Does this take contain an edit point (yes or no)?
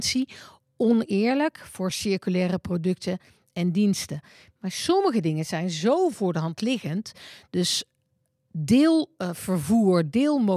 no